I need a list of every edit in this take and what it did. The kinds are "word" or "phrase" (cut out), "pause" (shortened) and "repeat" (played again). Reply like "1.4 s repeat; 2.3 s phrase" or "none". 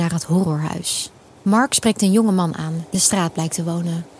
1.3 s pause; 2.9 s word